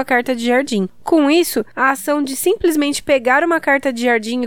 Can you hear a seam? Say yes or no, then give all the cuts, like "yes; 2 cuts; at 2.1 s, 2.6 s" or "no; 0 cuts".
no; 0 cuts